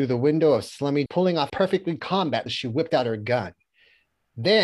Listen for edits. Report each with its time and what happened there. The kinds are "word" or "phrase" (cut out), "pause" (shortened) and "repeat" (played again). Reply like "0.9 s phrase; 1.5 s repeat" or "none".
1.1 s word; 1.5 s word; 2.0 s word; 2.5 s word